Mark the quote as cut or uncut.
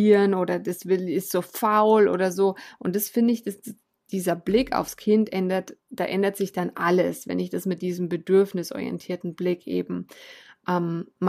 cut